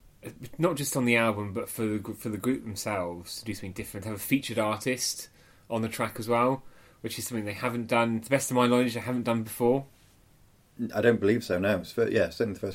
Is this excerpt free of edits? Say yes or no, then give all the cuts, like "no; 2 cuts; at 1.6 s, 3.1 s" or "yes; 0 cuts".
yes; 0 cuts